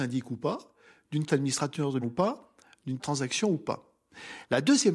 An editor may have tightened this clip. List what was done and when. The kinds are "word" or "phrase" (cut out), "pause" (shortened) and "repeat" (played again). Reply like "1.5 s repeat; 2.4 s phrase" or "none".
1.3 s word; 2.0 s word; 3.0 s word